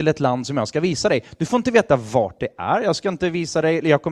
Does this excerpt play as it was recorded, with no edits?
yes; 0 cuts

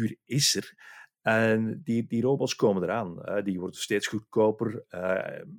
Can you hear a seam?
no; 0 cuts

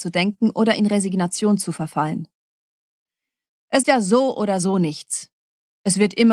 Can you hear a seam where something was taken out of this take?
yes; 1 cut; at 3.8 s

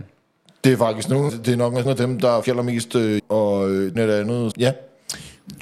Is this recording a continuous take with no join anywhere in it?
no; 6 cuts; at 1.3 s, 1.8 s, 2.4 s, 3.2 s, 4.0 s, 4.5 s

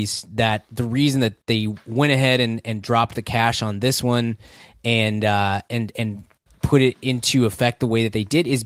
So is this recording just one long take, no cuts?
yes; 0 cuts

